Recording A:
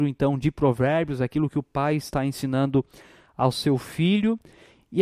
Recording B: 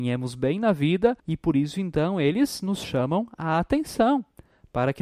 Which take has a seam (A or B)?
B